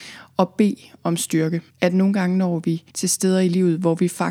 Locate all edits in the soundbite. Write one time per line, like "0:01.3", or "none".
0:01.7
0:02.9